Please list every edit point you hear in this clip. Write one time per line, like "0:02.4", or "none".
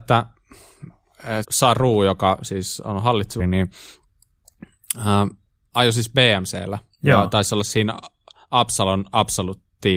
0:01.4
0:03.4